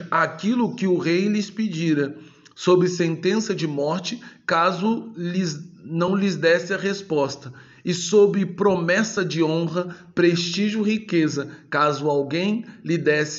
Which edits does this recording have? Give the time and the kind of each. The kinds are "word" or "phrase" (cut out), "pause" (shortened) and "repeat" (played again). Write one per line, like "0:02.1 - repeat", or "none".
none